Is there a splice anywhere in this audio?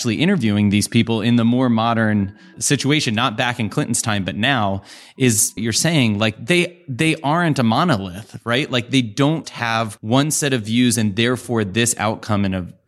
yes; 3 cuts; at 5.6 s, 9.4 s, 10.0 s

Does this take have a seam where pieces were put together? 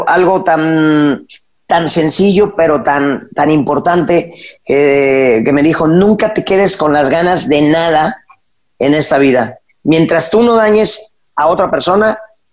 no; 0 cuts

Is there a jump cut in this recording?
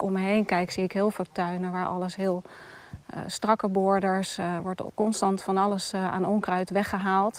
no; 0 cuts

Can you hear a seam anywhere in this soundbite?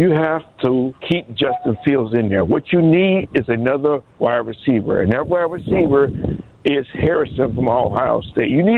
yes; 1 cut; at 1.0 s

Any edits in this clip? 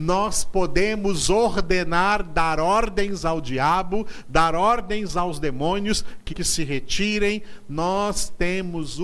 yes; 1 cut; at 6.3 s

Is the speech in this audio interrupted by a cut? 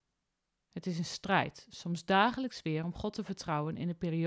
no; 0 cuts

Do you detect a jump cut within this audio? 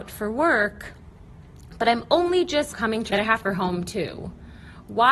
yes; 3 cuts; at 2.7 s, 3.1 s, 3.4 s

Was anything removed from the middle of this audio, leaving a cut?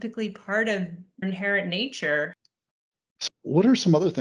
yes; 2 cuts; at 1.2 s, 3.3 s

